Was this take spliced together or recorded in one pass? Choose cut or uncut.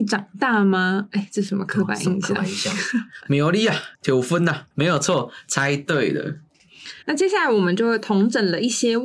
cut